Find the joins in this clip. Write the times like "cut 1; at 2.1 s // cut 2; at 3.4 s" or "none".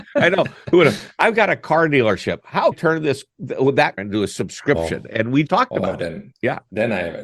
cut 1; at 2.7 s // cut 2; at 4.0 s // cut 3; at 5.5 s // cut 4; at 6.3 s